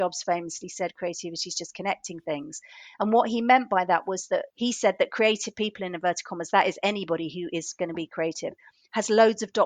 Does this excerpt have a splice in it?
yes; 1 cut; at 4.5 s

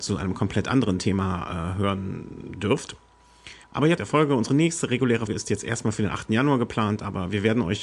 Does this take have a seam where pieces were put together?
yes; 3 cuts; at 3.6 s, 4.0 s, 5.3 s

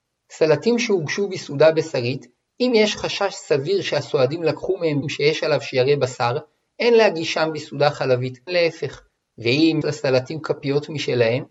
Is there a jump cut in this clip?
yes; 3 cuts; at 5.0 s, 8.5 s, 9.8 s

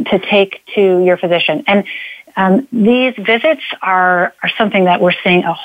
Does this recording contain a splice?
no; 0 cuts

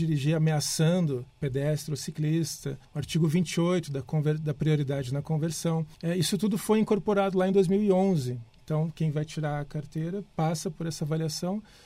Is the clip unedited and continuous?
no; 3 cuts; at 1.3 s, 2.8 s, 5.9 s

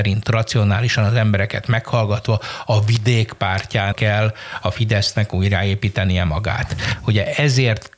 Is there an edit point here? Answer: yes; 1 cut; at 3.9 s

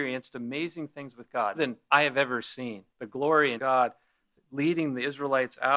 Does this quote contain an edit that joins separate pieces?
yes; 3 cuts; at 1.5 s, 2.9 s, 3.6 s

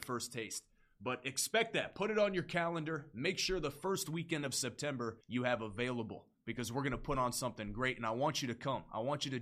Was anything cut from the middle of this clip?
yes; 1 cut; at 5.2 s

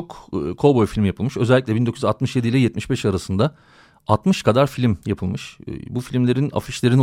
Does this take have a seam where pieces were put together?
no; 0 cuts

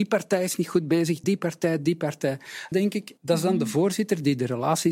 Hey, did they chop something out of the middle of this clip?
yes; 3 cuts; at 1.2 s, 2.7 s, 3.2 s

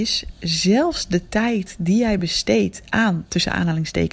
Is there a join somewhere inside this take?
no; 0 cuts

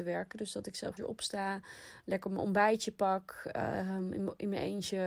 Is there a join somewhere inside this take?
yes; 1 cut; at 1.0 s

